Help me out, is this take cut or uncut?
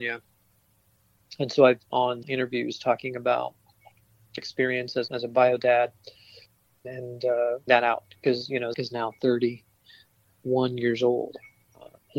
cut